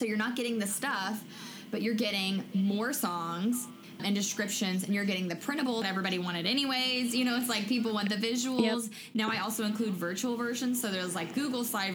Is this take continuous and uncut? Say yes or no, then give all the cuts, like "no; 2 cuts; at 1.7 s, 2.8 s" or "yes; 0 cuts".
no; 2 cuts; at 4.0 s, 5.8 s